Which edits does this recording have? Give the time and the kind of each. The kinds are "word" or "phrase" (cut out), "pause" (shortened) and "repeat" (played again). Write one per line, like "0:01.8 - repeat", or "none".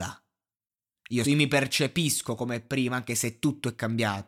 0:01.2 - phrase

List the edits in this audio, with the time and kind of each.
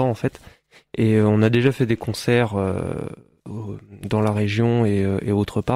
none

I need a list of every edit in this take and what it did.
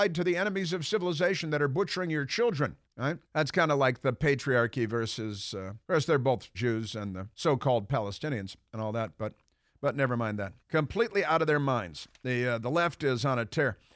0:02.8 - pause
0:03.2 - pause
0:05.8 - pause
0:06.5 - phrase
0:07.3 - pause
0:10.6 - pause

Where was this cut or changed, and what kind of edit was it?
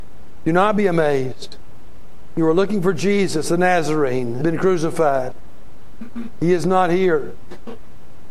0:04.4 - word

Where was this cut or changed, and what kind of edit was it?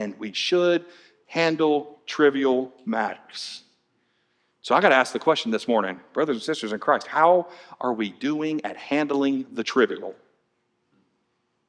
none

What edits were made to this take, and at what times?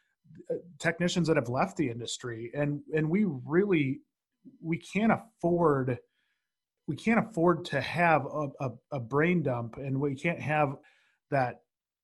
none

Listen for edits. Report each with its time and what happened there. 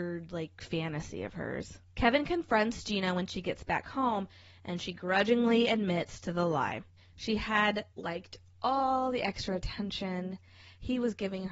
0:01.9 - pause
0:07.0 - pause
0:07.9 - pause

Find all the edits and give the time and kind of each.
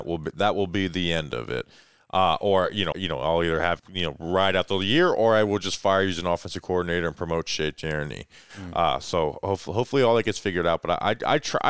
0:02.9 - word
0:03.8 - word

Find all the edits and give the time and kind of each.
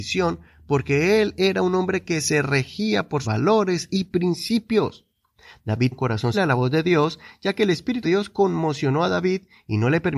0:03.2 - word
0:05.9 - word
0:06.3 - word
0:08.0 - word

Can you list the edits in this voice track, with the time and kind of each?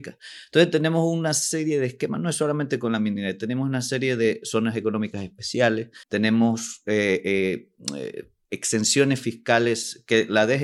0:06.0 - pause

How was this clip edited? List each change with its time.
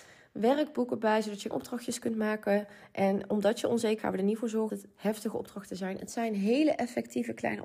0:01.5 - word
0:04.0 - word
0:04.7 - word

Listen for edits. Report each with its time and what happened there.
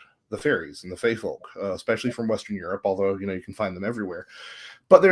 none

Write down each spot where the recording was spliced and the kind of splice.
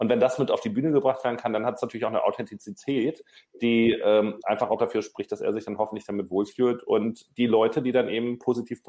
none

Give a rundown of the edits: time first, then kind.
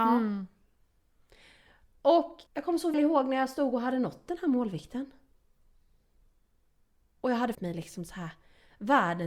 0:02.5 - pause
0:02.9 - word
0:07.5 - word

